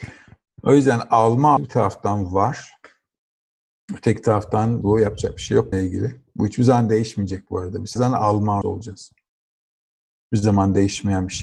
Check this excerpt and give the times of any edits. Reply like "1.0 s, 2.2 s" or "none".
1.6 s, 4.8 s, 5.7 s, 8.0 s, 8.6 s